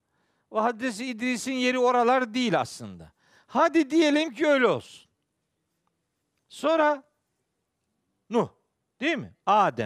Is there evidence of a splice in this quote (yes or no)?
no